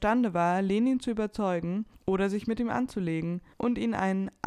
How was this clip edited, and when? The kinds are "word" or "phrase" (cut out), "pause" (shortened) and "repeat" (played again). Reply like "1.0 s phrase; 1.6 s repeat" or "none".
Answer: 1.9 s pause; 3.5 s pause